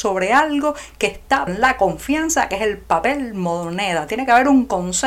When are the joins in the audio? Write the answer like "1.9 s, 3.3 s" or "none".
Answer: 1.5 s